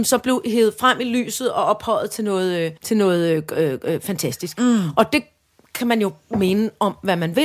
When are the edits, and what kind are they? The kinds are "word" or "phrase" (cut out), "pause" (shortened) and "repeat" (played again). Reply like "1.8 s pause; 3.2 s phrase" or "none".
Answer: 2.8 s pause

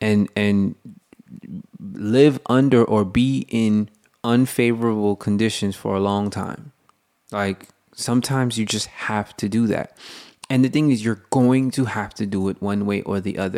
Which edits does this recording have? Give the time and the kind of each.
6.9 s pause

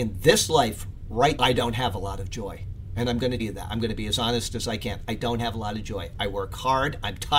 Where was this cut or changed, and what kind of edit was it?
1.4 s word; 3.4 s word

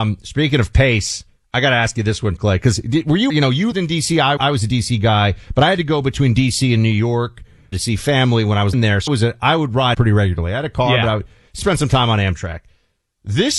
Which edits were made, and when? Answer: 2.4 s word; 3.3 s word; 3.7 s word; 4.4 s word; 7.7 s word; 8.7 s word; 9.1 s word; 9.9 s word; 11.6 s word

